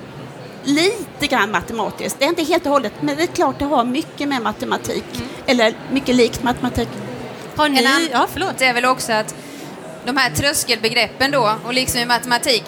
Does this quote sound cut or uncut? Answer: cut